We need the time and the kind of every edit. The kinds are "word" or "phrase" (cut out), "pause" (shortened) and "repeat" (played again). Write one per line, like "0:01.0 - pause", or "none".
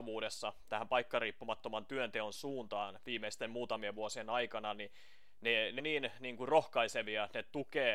0:05.8 - word